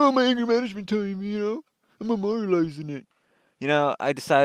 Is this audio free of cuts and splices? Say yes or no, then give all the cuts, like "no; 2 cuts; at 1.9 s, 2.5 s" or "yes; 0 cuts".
yes; 0 cuts